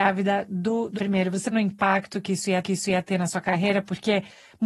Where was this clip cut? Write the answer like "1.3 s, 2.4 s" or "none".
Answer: 0.9 s, 1.5 s, 2.6 s